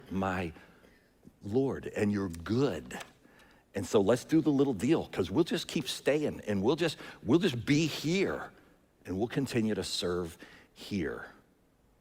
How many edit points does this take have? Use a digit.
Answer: 0